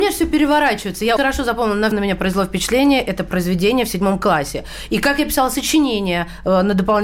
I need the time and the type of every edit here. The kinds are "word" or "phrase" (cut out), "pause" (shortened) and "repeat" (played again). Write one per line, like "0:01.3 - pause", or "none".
0:01.2 - word
0:01.9 - phrase